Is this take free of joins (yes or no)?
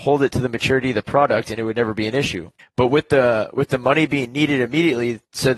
no